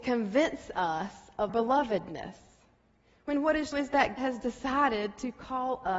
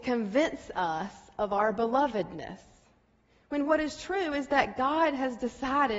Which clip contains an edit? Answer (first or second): first